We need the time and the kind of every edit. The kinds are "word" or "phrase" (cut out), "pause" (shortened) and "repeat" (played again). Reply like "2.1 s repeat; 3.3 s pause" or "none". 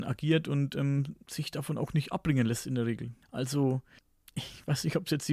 1.2 s pause; 3.2 s pause